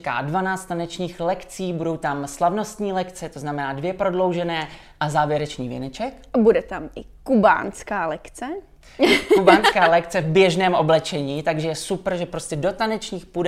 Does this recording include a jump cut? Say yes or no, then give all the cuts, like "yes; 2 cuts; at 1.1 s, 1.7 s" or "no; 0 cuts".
no; 0 cuts